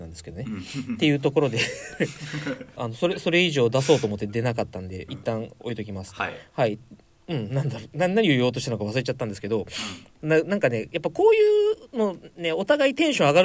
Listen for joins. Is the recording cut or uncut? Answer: cut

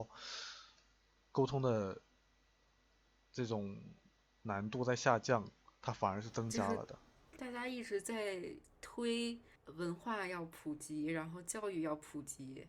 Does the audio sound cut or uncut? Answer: uncut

